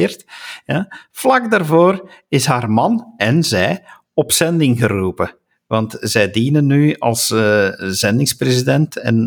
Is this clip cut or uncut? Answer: uncut